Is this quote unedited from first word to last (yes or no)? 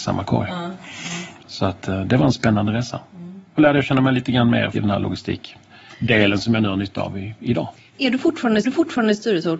no